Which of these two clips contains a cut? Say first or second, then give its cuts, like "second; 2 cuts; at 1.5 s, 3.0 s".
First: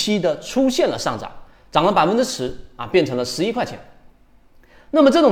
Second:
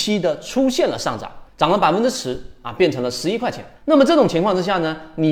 second; 2 cuts; at 1.5 s, 3.8 s